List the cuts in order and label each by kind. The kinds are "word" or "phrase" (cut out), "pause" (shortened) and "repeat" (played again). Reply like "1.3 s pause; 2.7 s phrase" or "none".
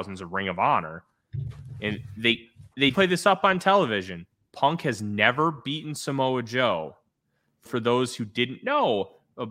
2.9 s word; 7.6 s word